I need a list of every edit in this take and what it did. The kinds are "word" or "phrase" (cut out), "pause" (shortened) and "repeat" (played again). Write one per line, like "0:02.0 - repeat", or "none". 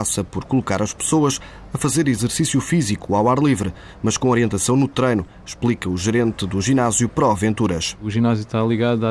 none